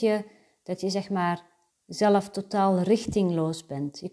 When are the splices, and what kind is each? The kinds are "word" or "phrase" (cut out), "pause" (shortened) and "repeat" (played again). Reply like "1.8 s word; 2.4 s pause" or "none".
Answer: 1.7 s pause

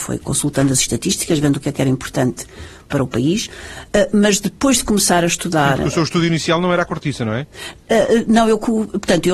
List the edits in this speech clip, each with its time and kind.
none

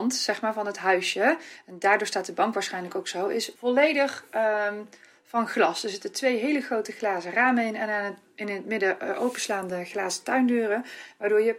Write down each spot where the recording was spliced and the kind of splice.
3.6 s pause

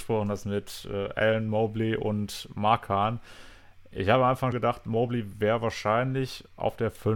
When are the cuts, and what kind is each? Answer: 4.5 s word

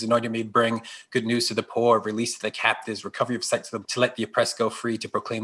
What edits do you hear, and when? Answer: 3.8 s word

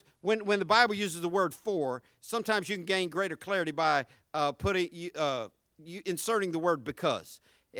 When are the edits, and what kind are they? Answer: none

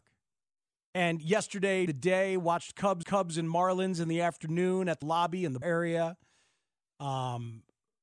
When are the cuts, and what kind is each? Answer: 1.9 s word; 3.0 s repeat; 5.0 s phrase; 5.6 s word

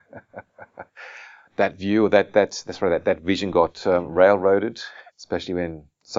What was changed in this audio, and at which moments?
5.1 s pause

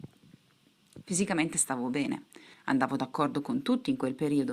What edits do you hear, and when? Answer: 2.5 s pause

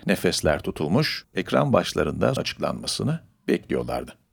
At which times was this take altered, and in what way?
1.3 s word; 2.4 s word

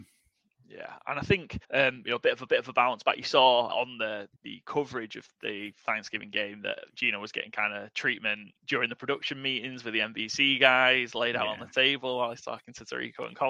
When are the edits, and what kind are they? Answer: 1.6 s pause; 2.5 s repeat; 3.7 s word; 4.4 s pause; 5.3 s word

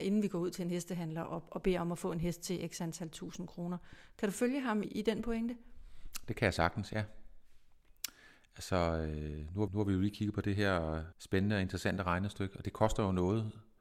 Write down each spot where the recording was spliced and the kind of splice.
4.8 s word; 9.7 s repeat; 11.1 s pause

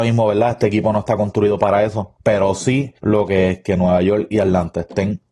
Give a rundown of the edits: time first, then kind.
2.2 s pause; 3.0 s pause

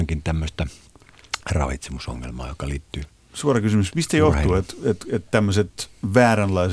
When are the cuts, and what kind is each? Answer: none

